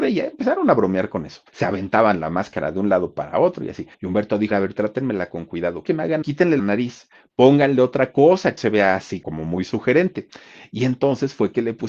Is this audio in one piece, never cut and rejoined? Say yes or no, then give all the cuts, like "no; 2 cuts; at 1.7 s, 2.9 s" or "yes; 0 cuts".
no; 8 cuts; at 1.5 s, 3.9 s, 4.5 s, 5.8 s, 6.2 s, 6.6 s, 8.6 s, 9.2 s